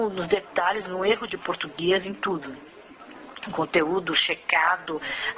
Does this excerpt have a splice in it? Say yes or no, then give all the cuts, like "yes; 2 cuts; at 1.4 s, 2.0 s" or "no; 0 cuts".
no; 0 cuts